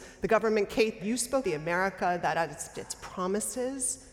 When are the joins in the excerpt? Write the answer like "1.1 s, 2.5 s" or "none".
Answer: 1.0 s, 1.4 s, 2.7 s